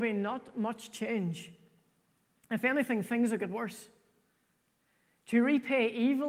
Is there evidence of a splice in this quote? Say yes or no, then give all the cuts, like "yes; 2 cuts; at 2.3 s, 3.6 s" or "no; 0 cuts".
no; 0 cuts